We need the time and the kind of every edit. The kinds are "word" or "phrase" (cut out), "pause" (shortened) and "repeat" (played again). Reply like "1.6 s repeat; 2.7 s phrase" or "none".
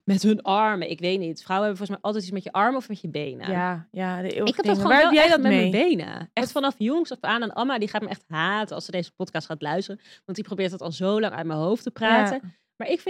none